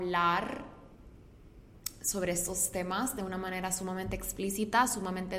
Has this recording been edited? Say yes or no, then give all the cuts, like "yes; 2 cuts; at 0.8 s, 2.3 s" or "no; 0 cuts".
no; 0 cuts